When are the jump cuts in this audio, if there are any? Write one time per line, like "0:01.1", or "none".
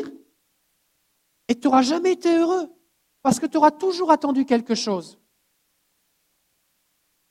none